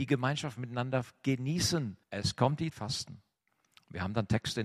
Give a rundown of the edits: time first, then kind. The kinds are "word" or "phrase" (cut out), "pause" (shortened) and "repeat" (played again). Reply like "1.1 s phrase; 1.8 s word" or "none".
2.0 s pause; 2.7 s phrase